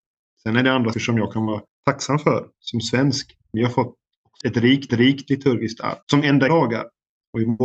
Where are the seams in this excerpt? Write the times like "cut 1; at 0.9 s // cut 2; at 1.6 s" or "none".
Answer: cut 1; at 0.9 s // cut 2; at 1.7 s // cut 3; at 4.4 s // cut 4; at 4.9 s // cut 5; at 6.0 s // cut 6; at 6.5 s